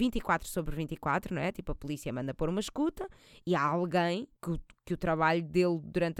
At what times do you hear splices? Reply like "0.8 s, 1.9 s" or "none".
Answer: 4.4 s